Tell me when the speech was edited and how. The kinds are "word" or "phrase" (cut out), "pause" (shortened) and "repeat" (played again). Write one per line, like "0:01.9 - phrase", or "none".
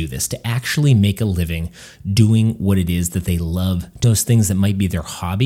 0:04.0 - phrase